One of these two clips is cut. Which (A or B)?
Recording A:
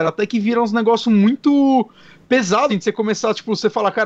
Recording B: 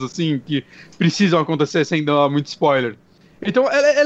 A